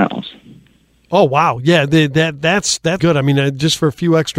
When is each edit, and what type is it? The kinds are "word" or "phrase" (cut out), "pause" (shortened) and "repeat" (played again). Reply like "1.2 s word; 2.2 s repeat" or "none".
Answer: 3.0 s word